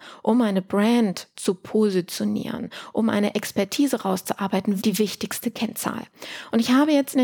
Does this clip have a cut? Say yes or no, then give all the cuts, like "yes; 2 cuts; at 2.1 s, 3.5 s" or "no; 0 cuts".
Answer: yes; 1 cut; at 4.8 s